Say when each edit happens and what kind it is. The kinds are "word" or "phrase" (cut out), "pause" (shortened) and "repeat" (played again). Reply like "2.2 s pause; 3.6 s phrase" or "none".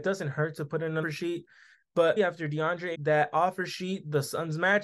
1.0 s word; 2.2 s word; 2.9 s phrase